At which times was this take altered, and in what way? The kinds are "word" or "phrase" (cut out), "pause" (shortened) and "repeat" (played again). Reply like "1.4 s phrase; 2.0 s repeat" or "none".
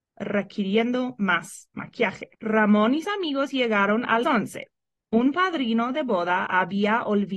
2.3 s pause; 3.0 s word; 4.2 s phrase